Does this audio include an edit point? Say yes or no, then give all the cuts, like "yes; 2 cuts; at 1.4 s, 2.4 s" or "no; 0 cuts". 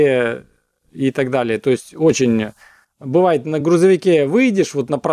no; 0 cuts